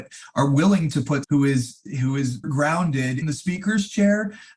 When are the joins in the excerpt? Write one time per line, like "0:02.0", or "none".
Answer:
0:01.2
0:02.4
0:03.2